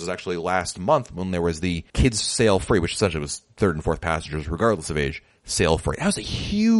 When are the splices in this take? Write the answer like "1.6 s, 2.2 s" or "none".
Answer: 1.9 s